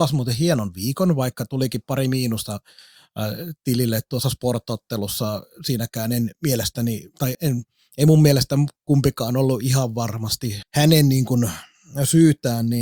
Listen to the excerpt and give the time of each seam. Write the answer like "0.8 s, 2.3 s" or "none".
7.3 s, 8.8 s, 10.6 s